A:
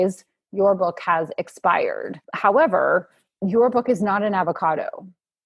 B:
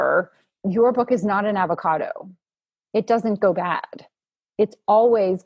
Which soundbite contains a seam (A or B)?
A